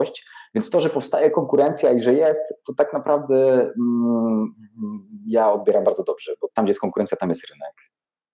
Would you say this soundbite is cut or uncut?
uncut